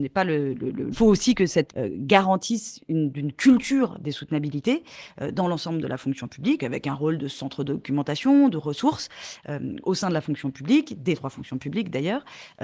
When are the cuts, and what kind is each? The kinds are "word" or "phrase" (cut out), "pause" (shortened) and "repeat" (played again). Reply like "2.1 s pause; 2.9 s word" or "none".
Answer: 0.9 s phrase; 1.7 s word; 3.1 s word; 6.6 s word